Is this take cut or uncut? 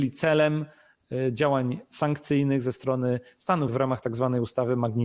cut